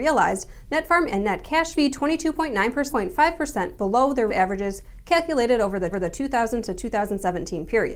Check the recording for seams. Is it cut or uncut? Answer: cut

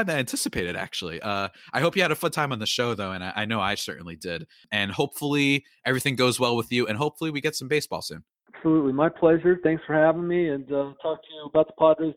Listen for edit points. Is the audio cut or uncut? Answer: uncut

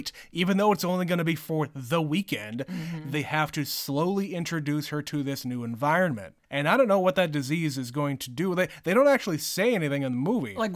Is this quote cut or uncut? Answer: cut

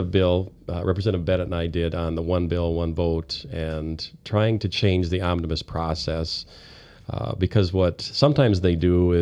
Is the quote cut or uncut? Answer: uncut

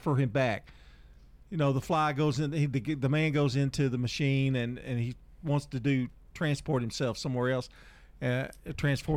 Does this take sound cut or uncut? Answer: uncut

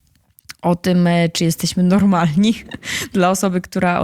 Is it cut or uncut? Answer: uncut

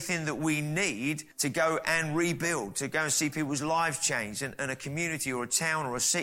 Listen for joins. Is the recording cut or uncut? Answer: cut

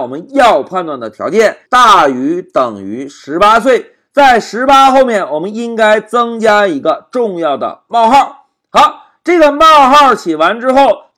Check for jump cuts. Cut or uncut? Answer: cut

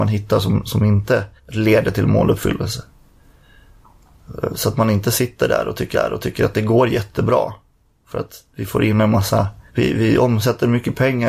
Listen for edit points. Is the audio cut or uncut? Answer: cut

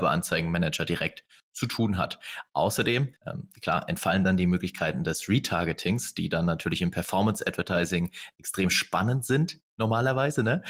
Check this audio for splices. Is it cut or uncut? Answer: cut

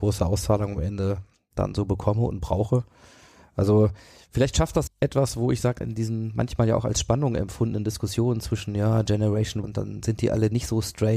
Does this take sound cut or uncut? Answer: cut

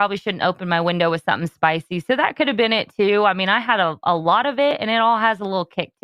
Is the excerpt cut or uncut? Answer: uncut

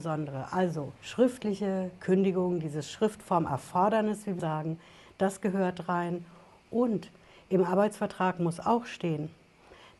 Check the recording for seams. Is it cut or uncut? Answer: cut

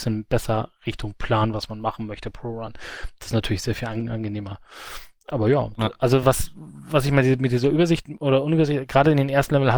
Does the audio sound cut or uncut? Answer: uncut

